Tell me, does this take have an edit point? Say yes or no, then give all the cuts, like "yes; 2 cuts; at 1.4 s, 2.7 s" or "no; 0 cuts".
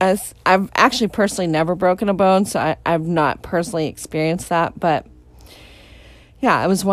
no; 0 cuts